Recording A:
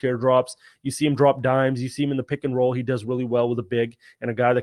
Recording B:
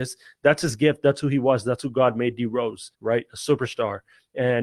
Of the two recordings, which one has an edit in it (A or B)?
B